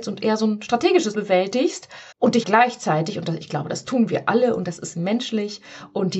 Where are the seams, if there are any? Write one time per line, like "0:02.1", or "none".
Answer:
0:01.1
0:02.1
0:02.4

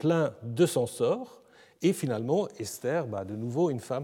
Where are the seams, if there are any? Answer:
none

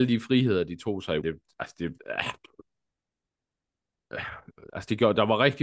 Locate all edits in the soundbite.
0:01.2
0:02.0

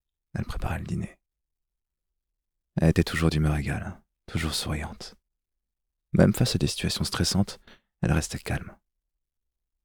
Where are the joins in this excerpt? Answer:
none

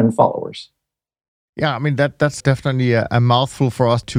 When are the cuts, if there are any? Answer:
0:02.4

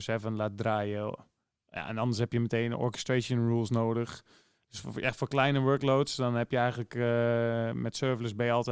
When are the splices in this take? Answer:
none

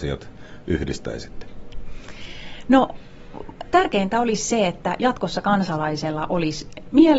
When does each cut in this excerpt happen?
none

